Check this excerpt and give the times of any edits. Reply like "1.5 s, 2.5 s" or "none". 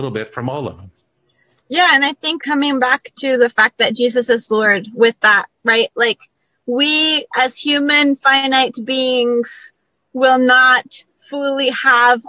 2.4 s